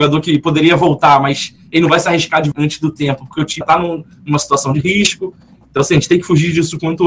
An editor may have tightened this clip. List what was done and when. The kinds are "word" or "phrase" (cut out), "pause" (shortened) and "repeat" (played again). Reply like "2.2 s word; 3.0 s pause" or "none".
2.5 s word; 3.6 s word